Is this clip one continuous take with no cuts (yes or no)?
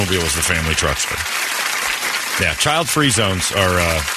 yes